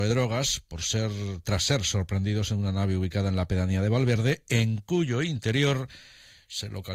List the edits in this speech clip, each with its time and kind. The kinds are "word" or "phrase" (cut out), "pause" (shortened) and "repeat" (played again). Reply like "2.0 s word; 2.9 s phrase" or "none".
none

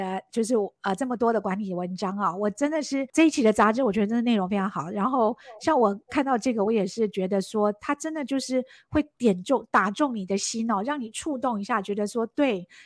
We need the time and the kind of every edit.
none

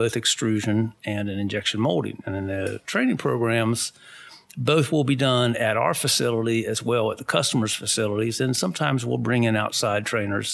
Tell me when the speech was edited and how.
none

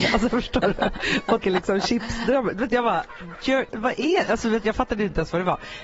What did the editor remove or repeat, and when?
1.4 s word; 3.4 s word; 3.7 s word

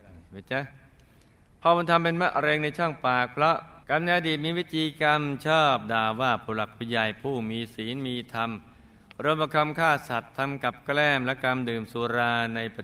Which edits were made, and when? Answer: 3.8 s pause

